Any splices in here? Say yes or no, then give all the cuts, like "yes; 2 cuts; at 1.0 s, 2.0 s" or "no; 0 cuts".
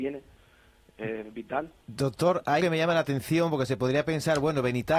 yes; 1 cut; at 2.6 s